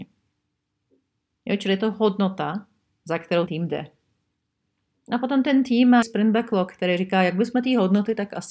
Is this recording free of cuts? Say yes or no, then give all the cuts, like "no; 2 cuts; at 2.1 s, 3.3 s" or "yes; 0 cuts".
no; 2 cuts; at 3.5 s, 6.0 s